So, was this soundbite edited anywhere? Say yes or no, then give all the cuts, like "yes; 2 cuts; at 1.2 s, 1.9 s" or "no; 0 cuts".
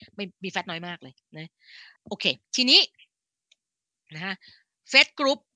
yes; 2 cuts; at 2.0 s, 2.4 s